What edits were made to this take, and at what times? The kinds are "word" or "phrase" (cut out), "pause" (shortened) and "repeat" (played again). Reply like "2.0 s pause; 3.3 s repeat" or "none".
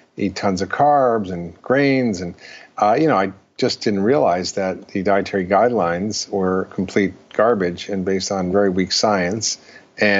none